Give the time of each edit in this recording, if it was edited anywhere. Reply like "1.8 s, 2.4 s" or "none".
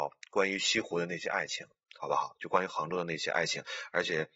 none